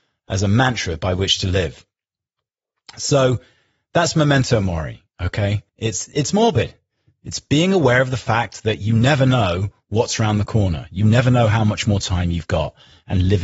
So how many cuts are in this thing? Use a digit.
1